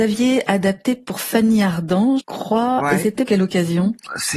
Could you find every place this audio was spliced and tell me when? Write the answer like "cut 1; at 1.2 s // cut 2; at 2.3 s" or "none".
cut 1; at 2.2 s // cut 2; at 3.3 s